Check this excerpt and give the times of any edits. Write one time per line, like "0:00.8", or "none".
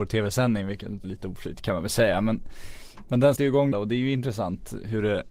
0:01.0
0:03.4
0:03.7